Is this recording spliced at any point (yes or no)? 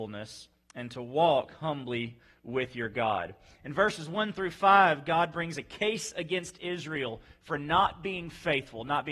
no